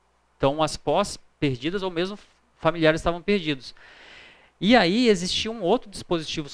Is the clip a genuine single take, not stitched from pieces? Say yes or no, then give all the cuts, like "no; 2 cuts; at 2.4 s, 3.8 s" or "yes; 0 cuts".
yes; 0 cuts